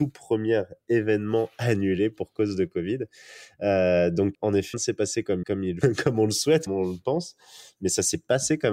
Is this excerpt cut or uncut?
cut